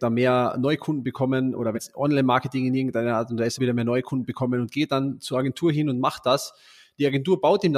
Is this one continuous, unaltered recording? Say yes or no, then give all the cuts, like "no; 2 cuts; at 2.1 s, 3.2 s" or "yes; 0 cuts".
no; 2 cuts; at 1.7 s, 3.6 s